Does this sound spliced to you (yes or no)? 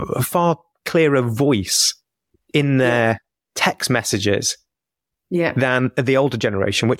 no